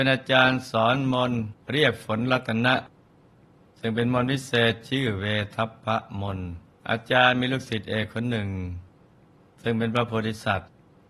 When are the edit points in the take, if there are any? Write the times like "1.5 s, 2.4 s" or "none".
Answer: 1.6 s, 6.7 s